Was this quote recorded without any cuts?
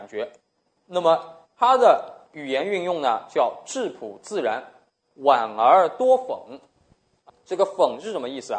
no; 1 cut; at 7.3 s

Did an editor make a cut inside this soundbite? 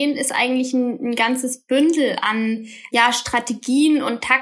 no; 0 cuts

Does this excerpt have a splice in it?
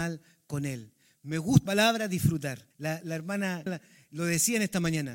yes; 3 cuts; at 1.7 s, 2.7 s, 3.7 s

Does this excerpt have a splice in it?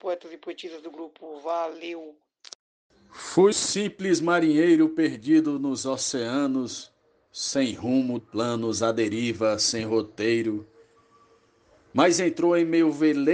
yes; 2 cuts; at 3.5 s, 8.2 s

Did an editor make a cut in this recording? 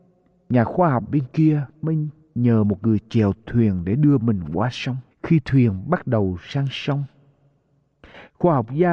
yes; 2 cuts; at 1.1 s, 5.1 s

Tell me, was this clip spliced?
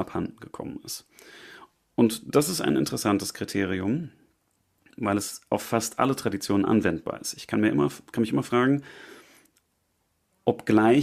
no; 0 cuts

